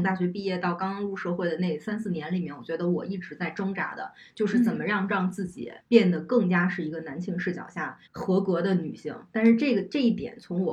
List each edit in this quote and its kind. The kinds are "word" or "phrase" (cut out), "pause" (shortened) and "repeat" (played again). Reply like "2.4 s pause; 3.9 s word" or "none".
5.8 s pause; 8.1 s pause